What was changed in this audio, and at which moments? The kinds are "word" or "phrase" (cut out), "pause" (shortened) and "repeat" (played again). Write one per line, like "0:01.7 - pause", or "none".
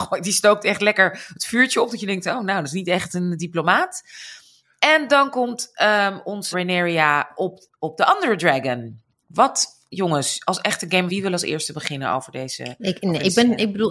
0:06.5 - word
0:11.1 - phrase